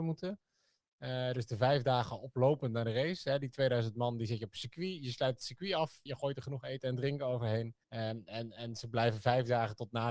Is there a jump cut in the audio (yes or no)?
yes